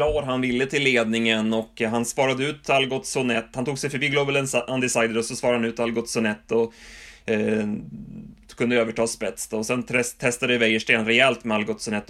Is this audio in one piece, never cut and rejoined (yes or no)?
yes